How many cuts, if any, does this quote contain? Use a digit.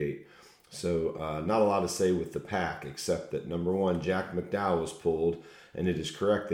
0